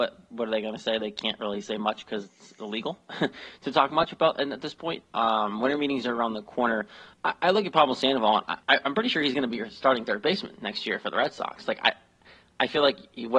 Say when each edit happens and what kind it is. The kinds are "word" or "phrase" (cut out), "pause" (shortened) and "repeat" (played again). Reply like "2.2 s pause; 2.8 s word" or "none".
7.1 s pause; 8.6 s pause